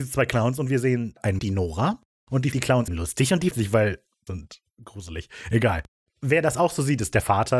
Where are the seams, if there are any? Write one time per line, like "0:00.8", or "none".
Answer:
0:01.4
0:02.5
0:02.9
0:03.5
0:04.3